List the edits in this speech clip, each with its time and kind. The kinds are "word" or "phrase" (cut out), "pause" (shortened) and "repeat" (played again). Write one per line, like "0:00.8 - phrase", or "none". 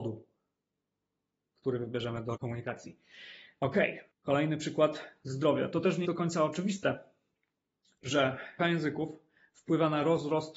0:02.4 - word
0:04.1 - pause
0:06.0 - word
0:08.6 - word